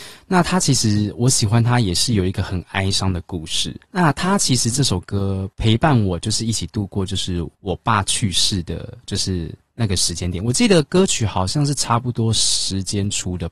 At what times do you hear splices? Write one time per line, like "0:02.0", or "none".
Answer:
0:03.8
0:05.5
0:07.5